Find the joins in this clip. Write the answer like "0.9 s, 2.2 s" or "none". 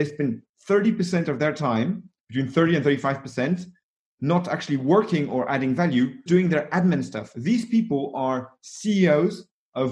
6.3 s